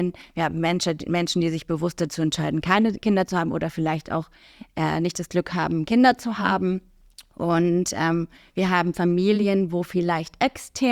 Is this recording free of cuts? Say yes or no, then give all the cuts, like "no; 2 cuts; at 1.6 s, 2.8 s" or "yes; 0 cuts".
yes; 0 cuts